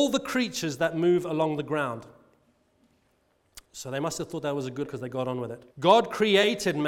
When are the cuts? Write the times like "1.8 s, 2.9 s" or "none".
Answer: 3.6 s, 4.8 s, 5.7 s